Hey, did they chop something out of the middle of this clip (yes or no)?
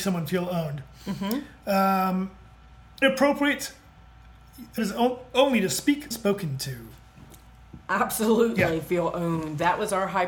yes